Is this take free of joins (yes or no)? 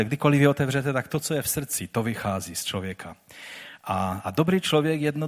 yes